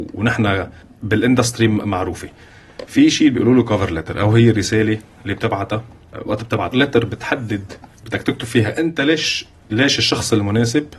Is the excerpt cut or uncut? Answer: cut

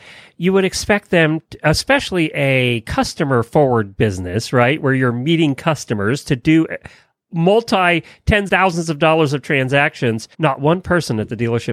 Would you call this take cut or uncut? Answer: cut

